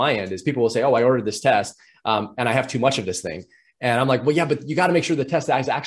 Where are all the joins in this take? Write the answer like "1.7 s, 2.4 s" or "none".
none